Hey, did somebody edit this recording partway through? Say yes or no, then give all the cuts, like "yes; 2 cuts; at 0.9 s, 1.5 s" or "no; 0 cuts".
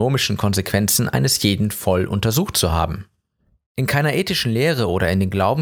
no; 0 cuts